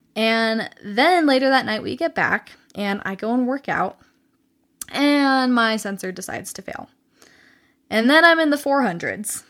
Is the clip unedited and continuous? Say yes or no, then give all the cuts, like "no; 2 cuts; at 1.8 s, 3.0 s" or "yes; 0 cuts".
yes; 0 cuts